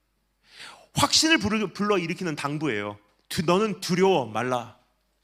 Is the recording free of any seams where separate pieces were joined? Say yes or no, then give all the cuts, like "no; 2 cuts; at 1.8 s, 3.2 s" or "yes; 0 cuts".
yes; 0 cuts